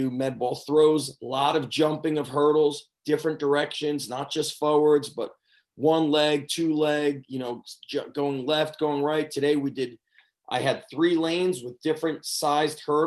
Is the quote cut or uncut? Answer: uncut